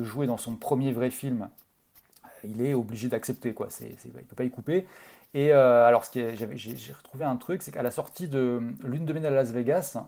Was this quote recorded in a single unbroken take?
yes; 0 cuts

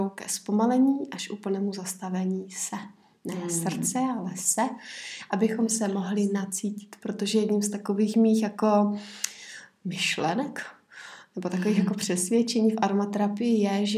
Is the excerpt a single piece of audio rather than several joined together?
yes; 0 cuts

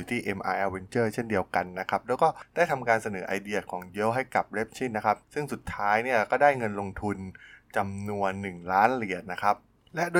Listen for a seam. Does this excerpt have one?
no; 0 cuts

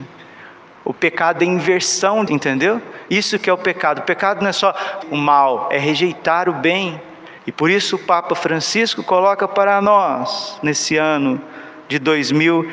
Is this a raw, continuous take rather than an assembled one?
no; 3 cuts; at 2.3 s, 5.0 s, 7.4 s

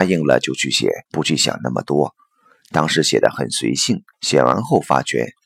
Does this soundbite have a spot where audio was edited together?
yes; 2 cuts; at 1.1 s, 4.1 s

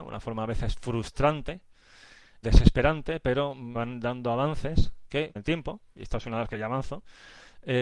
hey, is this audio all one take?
no; 4 cuts; at 2.4 s, 3.7 s, 5.4 s, 6.5 s

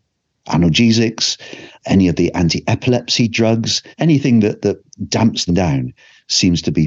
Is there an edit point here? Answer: yes; 3 cuts; at 1.7 s, 3.9 s, 5.5 s

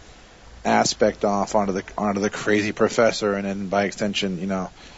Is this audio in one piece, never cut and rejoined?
yes; 0 cuts

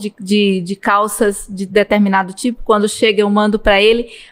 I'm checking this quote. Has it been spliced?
no; 0 cuts

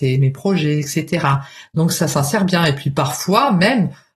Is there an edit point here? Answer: no; 0 cuts

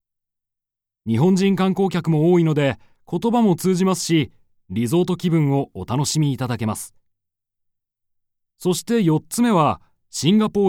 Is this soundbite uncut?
yes; 0 cuts

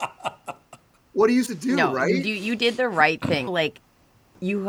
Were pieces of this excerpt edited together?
yes; 2 cuts; at 1.5 s, 3.5 s

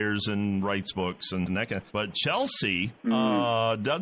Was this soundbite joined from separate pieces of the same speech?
yes; 3 cuts; at 1.5 s, 1.9 s, 3.0 s

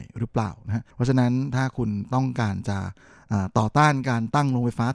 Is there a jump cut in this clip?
yes; 1 cut; at 0.9 s

